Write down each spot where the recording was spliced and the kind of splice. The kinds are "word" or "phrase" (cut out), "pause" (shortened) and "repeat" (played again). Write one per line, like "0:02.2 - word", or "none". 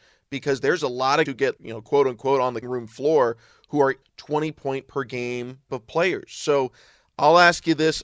0:01.3 - word
0:01.6 - word
0:02.6 - word
0:04.0 - word
0:05.7 - word